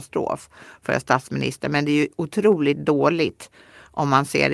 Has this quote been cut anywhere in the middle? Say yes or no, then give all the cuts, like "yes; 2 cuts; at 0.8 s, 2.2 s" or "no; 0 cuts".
no; 0 cuts